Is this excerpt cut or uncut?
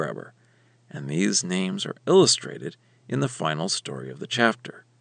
uncut